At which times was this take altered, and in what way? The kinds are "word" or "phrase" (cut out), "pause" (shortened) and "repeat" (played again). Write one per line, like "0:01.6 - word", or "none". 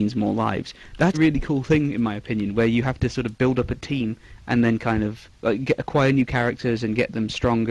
0:01.1 - word
0:05.3 - pause